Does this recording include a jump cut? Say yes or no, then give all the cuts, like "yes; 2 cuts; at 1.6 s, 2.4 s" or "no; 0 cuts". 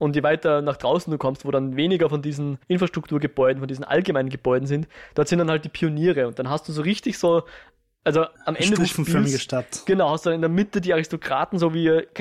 yes; 2 cuts; at 2.6 s, 8.3 s